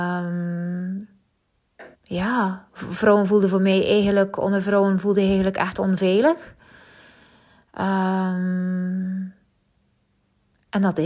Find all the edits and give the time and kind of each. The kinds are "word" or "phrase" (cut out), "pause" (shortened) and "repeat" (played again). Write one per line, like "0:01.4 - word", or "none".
0:01.9 - pause